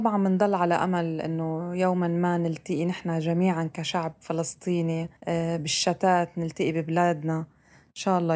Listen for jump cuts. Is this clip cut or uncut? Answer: cut